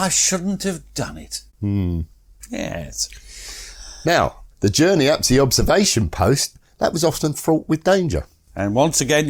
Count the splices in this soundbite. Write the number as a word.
two